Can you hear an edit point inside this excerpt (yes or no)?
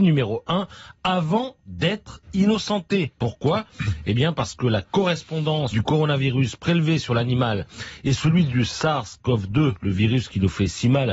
yes